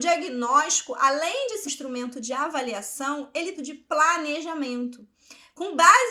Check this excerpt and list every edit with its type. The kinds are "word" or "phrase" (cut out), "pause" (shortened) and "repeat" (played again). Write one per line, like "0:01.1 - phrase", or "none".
0:01.6 - word
0:03.5 - phrase